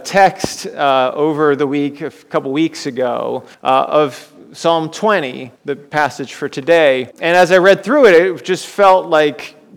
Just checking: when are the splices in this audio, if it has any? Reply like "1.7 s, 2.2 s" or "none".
3.5 s, 5.6 s, 7.1 s